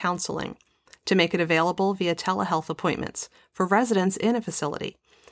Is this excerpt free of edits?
yes; 0 cuts

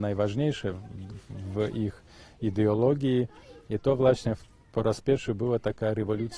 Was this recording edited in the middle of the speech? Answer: no; 0 cuts

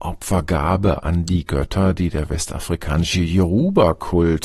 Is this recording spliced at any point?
no; 0 cuts

